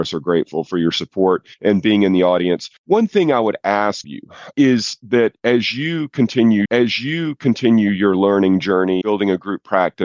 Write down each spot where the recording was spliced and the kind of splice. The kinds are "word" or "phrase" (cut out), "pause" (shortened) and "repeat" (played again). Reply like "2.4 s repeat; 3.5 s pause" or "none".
1.5 s pause; 2.8 s pause; 4.0 s word; 4.5 s word; 6.7 s repeat; 9.0 s word